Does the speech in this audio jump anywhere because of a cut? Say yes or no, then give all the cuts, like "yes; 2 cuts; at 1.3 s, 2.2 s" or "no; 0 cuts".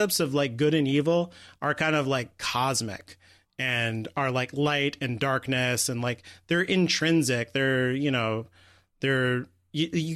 no; 0 cuts